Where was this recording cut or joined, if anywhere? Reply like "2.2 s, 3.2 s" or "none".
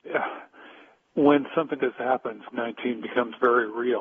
1.8 s, 2.5 s